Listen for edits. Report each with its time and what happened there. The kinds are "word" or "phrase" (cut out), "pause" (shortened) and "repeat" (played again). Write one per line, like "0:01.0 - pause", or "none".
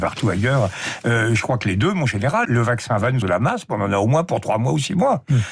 0:02.4 - word
0:03.2 - word